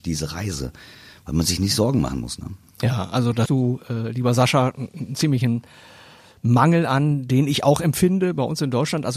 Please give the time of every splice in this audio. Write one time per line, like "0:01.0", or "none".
0:03.5